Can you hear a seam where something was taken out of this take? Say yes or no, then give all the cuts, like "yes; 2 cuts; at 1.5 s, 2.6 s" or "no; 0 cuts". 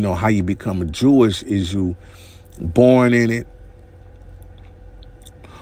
no; 0 cuts